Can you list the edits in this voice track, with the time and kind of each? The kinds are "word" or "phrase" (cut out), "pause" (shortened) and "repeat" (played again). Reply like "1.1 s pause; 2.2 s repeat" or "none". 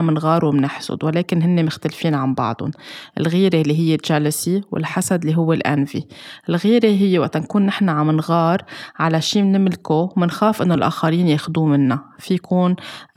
none

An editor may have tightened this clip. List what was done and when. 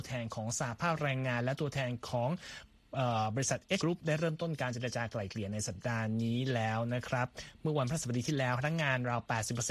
3.8 s word

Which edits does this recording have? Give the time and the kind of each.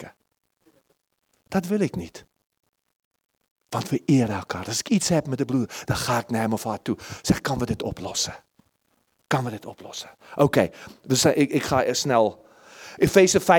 none

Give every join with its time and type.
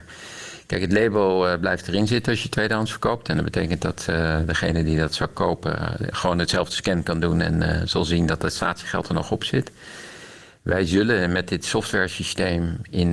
6.1 s word

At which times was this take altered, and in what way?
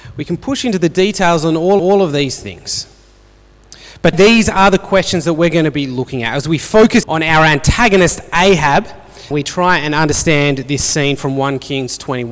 1.8 s repeat; 4.1 s word; 7.0 s word; 9.3 s word

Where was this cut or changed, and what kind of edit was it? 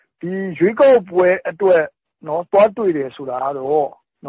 none

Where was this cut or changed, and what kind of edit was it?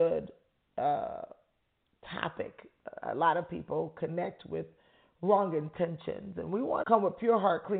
6.8 s word

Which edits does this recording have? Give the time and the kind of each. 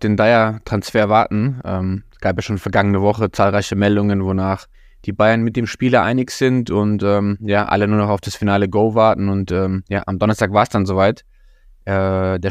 4.7 s pause

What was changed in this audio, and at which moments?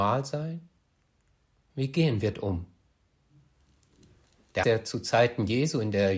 2.3 s word; 4.6 s word

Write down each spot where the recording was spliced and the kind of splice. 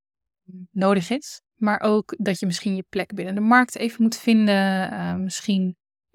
1.4 s pause

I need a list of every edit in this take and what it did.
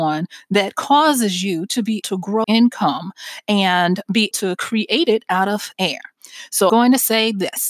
2.0 s word; 2.4 s word; 4.3 s word; 5.7 s word; 6.7 s word

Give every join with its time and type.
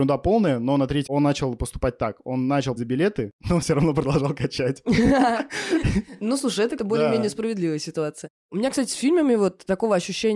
1.1 s word; 2.8 s word; 3.6 s word; 6.8 s word

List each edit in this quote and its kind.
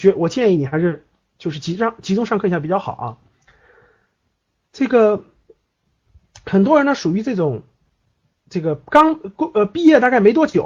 none

